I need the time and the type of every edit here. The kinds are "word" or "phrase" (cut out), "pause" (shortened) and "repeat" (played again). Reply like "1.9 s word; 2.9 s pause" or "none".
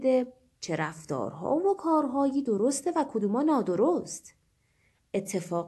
none

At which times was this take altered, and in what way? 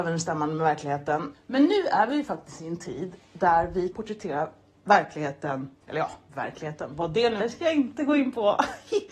3.9 s word; 5.8 s pause; 7.4 s word

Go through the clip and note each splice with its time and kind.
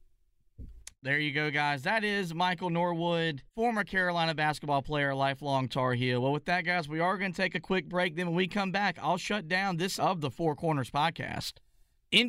3.5 s pause; 10.0 s word

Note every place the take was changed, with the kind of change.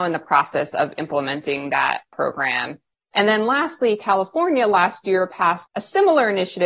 none

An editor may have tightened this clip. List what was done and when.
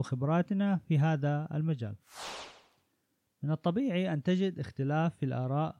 none

